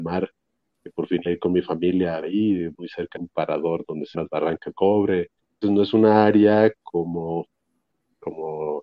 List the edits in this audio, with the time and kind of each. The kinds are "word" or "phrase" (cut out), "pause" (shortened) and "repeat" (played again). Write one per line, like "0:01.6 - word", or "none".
0:01.3 - word
0:02.2 - word
0:02.7 - word
0:03.2 - word
0:04.1 - word
0:04.7 - word
0:05.6 - word